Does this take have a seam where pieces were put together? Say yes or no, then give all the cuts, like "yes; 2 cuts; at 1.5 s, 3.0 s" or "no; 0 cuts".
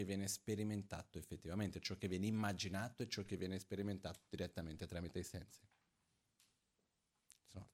no; 0 cuts